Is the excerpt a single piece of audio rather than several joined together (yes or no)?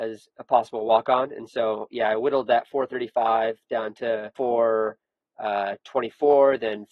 no